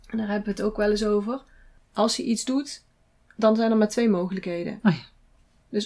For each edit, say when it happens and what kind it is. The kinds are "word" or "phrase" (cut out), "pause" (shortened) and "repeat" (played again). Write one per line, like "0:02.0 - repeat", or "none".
none